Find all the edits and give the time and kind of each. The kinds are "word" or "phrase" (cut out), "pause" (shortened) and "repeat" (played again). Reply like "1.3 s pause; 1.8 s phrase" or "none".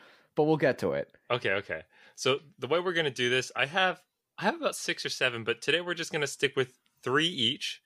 none